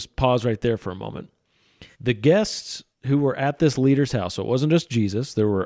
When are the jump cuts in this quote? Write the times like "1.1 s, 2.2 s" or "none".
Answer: 1.9 s, 2.9 s

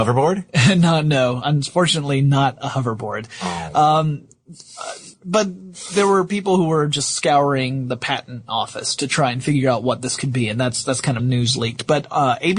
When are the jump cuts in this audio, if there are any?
5.1 s, 11.2 s

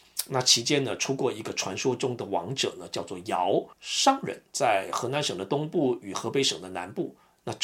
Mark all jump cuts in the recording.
3.7 s

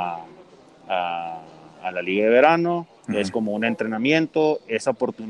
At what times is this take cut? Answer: 3.0 s

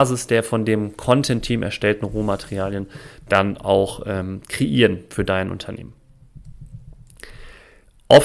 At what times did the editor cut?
none

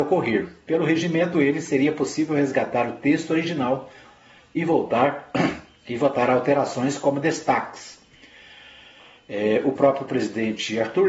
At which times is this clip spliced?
1.3 s

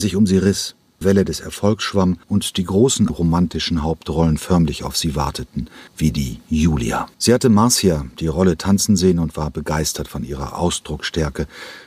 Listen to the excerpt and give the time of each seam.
1.0 s, 2.2 s, 3.1 s, 5.9 s, 7.1 s

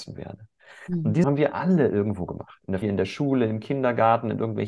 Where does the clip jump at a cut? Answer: 1.2 s, 2.8 s

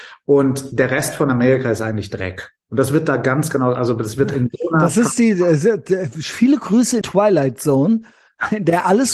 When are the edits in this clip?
2.6 s, 7.0 s

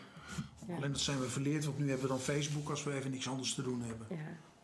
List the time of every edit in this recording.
none

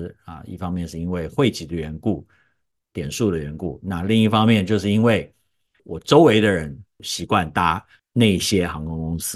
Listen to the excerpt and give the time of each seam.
none

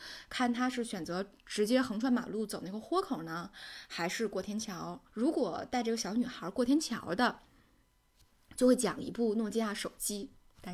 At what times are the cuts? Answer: 5.1 s

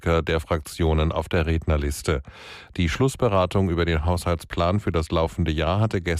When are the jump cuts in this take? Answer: none

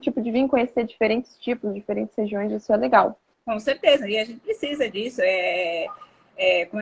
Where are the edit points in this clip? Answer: 3.3 s

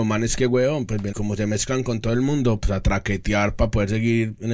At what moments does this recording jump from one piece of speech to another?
1.1 s

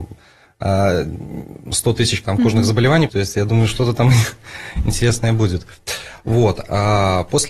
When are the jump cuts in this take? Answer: 2.2 s, 3.1 s

